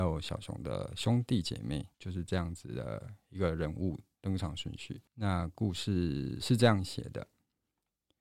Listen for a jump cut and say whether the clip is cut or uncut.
cut